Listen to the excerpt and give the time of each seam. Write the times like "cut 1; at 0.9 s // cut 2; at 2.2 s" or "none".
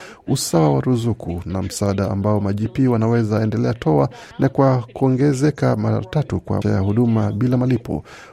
cut 1; at 4.3 s // cut 2; at 6.6 s